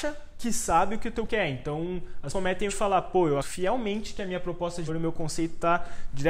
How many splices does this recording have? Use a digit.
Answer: 5